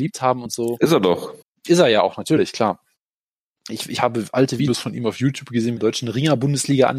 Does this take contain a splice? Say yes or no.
yes